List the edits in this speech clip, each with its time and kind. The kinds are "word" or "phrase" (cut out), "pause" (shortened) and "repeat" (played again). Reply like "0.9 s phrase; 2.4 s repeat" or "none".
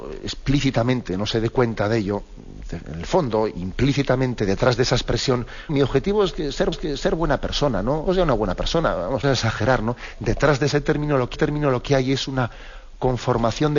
5.7 s word; 6.7 s repeat; 8.1 s phrase; 9.2 s phrase; 11.4 s repeat